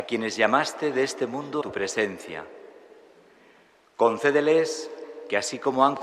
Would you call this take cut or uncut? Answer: cut